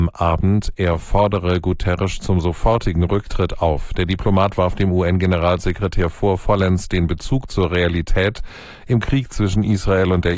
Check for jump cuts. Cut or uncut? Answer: uncut